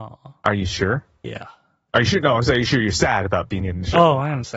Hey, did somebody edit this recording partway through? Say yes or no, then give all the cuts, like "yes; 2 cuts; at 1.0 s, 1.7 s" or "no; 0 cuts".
no; 0 cuts